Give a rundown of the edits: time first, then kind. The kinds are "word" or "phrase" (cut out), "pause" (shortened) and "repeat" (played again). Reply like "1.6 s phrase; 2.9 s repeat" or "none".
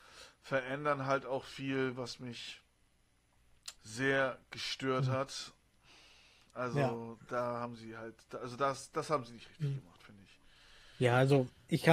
3.8 s pause